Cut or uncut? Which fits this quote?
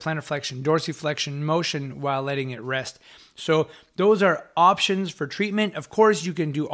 uncut